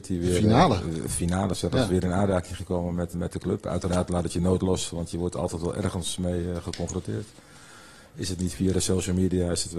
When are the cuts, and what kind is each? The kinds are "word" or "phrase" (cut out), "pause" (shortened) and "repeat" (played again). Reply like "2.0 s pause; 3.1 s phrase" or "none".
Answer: 3.1 s word